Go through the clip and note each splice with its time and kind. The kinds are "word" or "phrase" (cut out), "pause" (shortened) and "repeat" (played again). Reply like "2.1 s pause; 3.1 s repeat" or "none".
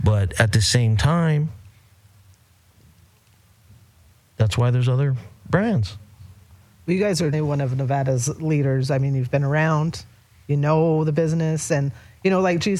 7.3 s word